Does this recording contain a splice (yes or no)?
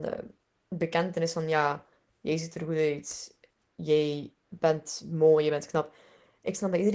no